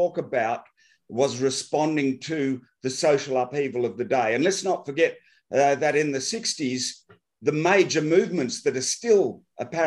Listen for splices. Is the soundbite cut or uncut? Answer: uncut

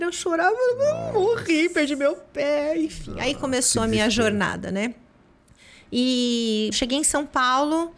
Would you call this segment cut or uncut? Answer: cut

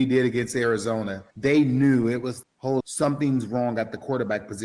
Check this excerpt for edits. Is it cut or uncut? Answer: cut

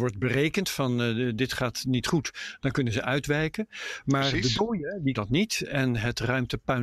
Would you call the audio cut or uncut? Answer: cut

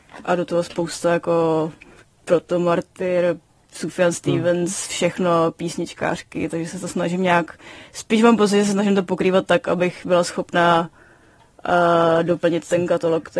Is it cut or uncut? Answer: uncut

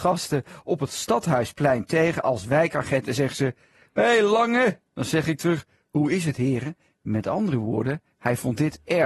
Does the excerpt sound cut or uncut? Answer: uncut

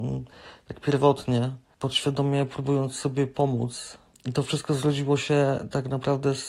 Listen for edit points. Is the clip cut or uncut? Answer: uncut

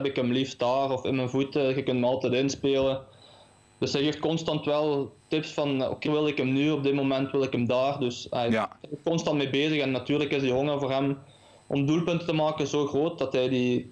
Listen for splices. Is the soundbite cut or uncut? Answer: cut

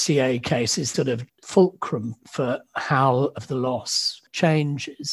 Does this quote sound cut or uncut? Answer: cut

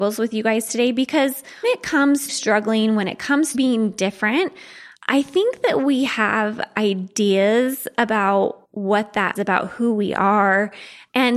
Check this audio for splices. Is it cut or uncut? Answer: cut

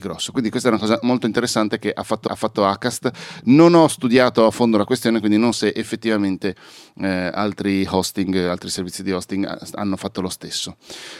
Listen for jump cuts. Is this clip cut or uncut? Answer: cut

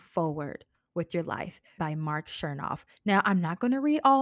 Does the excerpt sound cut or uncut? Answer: cut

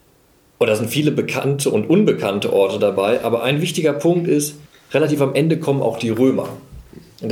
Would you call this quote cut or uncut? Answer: cut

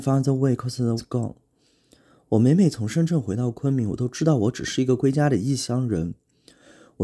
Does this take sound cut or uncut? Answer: cut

